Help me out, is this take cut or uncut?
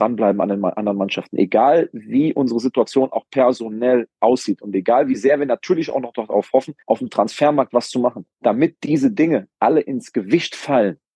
cut